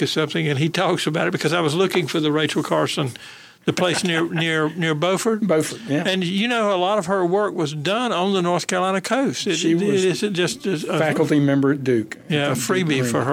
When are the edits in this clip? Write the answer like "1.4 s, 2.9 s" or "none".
none